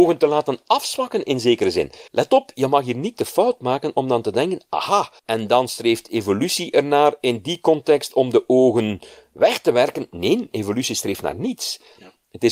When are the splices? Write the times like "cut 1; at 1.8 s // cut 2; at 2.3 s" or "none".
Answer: cut 1; at 2.1 s // cut 2; at 5.2 s